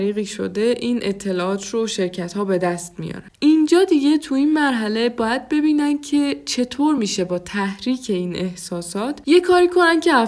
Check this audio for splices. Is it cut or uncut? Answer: uncut